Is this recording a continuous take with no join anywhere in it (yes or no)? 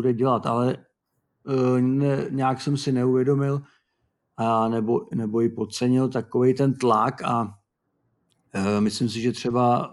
yes